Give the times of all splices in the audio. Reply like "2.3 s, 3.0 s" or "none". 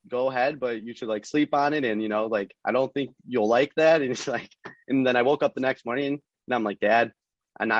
2.6 s